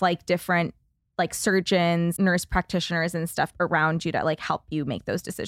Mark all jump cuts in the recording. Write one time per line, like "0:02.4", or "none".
0:02.2
0:03.5